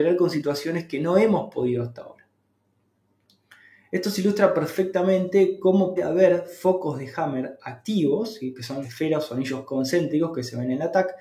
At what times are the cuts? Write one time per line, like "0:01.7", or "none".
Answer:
0:06.0
0:08.8